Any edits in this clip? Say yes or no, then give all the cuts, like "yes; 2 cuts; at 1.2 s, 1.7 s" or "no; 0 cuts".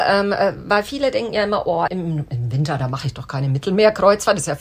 yes; 1 cut; at 1.9 s